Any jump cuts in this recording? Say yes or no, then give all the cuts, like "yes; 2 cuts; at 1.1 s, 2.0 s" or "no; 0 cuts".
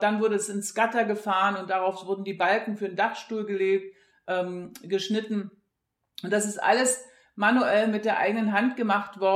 no; 0 cuts